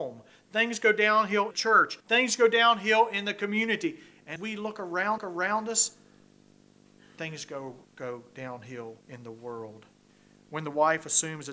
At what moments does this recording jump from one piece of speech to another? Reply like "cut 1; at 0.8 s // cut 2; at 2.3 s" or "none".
cut 1; at 1.5 s // cut 2; at 2.0 s // cut 3; at 4.4 s // cut 4; at 5.2 s // cut 5; at 7.8 s // cut 6; at 9.0 s // cut 7; at 10.1 s

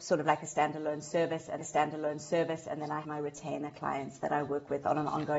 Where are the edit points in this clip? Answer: cut 1; at 1.6 s // cut 2; at 3.0 s

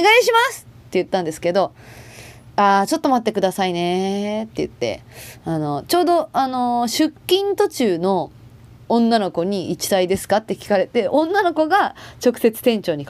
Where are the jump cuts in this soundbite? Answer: none

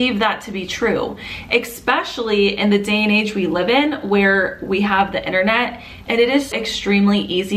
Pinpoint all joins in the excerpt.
cut 1; at 6.5 s

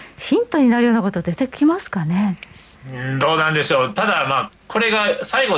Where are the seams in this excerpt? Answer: none

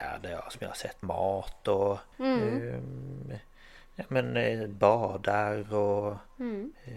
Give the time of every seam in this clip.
cut 1; at 1.0 s // cut 2; at 2.1 s

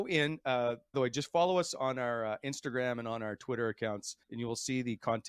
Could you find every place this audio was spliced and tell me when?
cut 1; at 0.9 s // cut 2; at 4.2 s

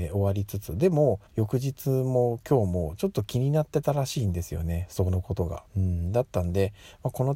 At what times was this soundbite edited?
cut 1; at 1.3 s // cut 2; at 5.7 s

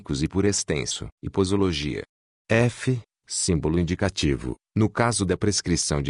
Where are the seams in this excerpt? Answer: cut 1; at 1.1 s

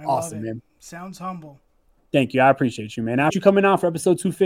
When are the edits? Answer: cut 1; at 3.3 s

